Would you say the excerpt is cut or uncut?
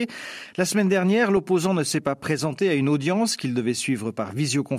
uncut